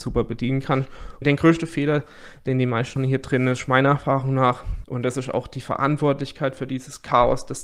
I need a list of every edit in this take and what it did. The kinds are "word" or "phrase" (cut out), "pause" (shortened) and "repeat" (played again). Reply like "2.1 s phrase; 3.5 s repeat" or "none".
3.0 s word